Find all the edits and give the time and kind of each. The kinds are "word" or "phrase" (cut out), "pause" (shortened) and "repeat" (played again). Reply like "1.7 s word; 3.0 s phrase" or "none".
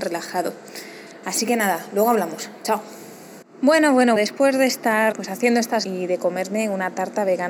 3.4 s pause; 4.2 s word; 5.1 s word; 5.8 s phrase